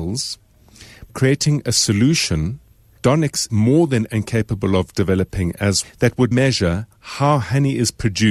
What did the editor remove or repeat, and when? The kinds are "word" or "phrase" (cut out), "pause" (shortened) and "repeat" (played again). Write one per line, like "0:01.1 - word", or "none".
0:01.1 - word
0:03.0 - word
0:03.5 - word
0:04.1 - word
0:05.8 - word
0:06.3 - word